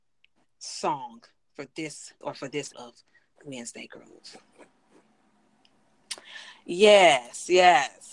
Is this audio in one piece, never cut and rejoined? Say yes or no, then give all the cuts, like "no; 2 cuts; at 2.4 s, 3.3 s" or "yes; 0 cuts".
no; 2 cuts; at 2.2 s, 2.7 s